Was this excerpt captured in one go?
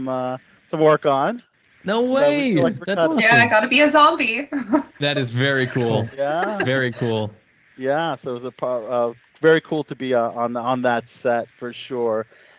yes; 0 cuts

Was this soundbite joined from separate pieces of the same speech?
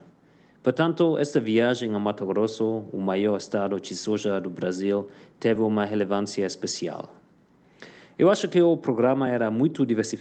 no; 0 cuts

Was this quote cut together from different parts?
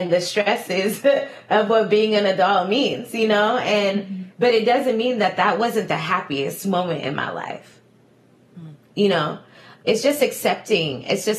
no; 0 cuts

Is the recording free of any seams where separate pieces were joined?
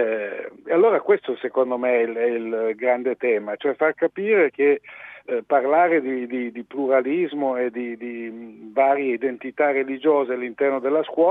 yes; 0 cuts

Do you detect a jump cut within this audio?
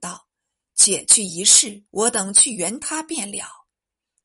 yes; 1 cut; at 1.9 s

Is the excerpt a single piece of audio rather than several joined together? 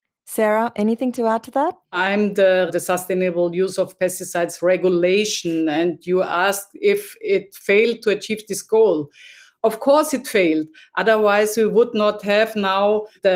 no; 2 cuts; at 1.8 s, 2.7 s

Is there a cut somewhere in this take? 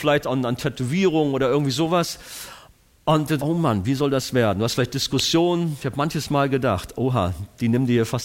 yes; 1 cut; at 3.4 s

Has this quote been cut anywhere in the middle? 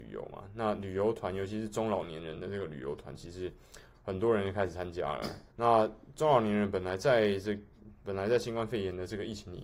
yes; 1 cut; at 5.5 s

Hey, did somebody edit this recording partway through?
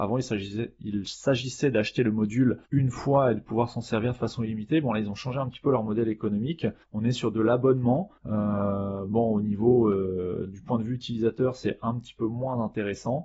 yes; 3 cuts; at 2.6 s, 6.8 s, 8.2 s

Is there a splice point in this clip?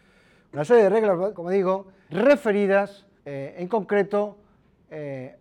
yes; 3 cuts; at 1.3 s, 2.1 s, 3.2 s

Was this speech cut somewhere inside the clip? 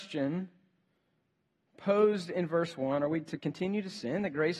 no; 0 cuts

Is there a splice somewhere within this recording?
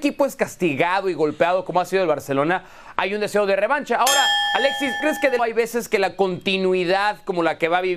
yes; 2 cuts; at 5.0 s, 5.4 s

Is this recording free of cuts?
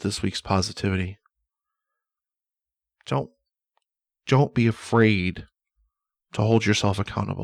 yes; 0 cuts

